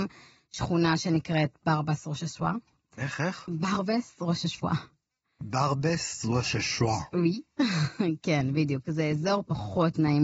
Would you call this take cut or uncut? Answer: uncut